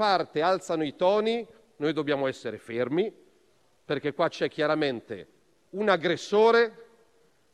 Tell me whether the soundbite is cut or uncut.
uncut